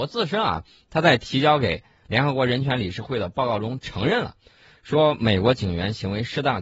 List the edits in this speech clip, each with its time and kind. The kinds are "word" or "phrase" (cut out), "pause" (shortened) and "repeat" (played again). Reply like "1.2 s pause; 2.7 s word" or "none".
none